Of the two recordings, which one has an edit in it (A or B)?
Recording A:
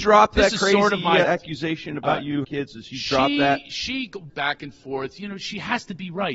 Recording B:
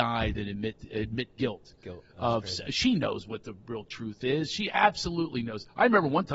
A